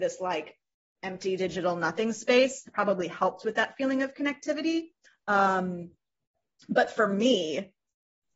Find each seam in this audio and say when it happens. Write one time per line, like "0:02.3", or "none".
0:05.1

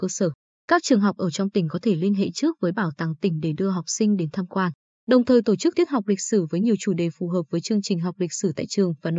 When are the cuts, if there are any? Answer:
0:05.7

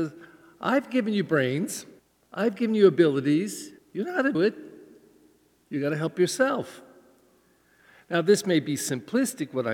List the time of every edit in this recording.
0:02.0
0:03.8
0:04.3

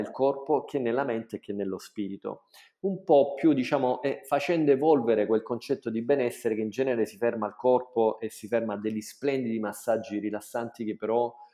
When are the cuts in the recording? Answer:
none

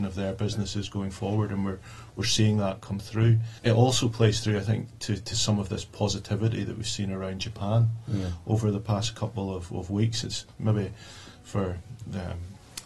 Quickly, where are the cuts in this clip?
0:03.6

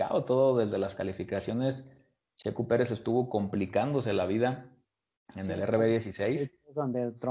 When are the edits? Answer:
none

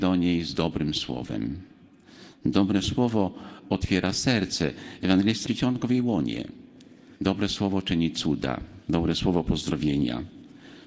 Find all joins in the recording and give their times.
0:05.5
0:07.2
0:08.8

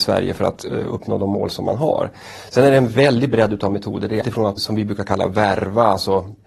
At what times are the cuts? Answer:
0:04.2
0:04.6

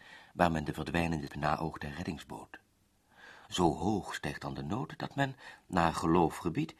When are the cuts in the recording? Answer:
0:01.3

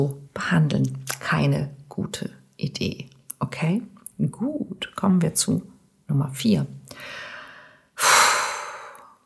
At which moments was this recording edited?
none

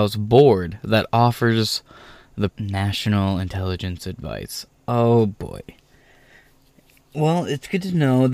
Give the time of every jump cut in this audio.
0:02.5

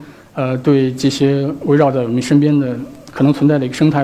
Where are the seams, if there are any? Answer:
none

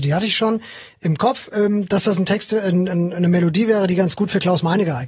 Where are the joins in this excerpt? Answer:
none

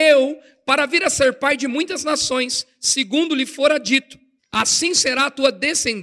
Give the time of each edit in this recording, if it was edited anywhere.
0:04.4

